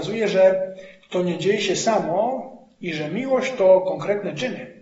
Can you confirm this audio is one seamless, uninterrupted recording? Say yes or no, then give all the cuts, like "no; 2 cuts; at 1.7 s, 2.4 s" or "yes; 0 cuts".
yes; 0 cuts